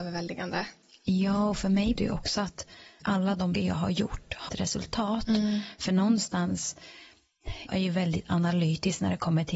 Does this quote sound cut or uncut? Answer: cut